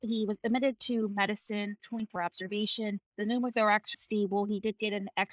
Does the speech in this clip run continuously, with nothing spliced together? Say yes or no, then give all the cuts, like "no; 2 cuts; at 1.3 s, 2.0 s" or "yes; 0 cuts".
no; 4 cuts; at 1.8 s, 2.2 s, 3.1 s, 3.9 s